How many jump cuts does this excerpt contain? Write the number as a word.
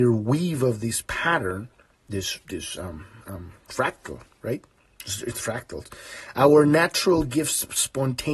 zero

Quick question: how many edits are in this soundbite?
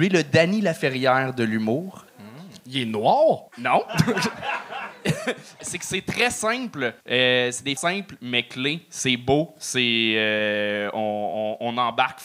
five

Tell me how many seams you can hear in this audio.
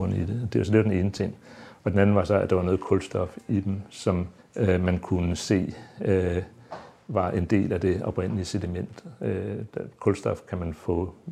one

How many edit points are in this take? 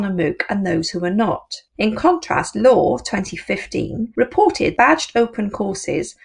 two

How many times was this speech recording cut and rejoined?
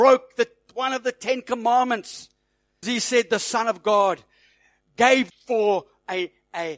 two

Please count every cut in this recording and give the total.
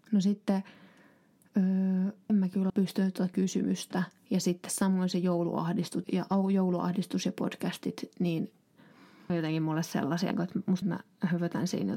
seven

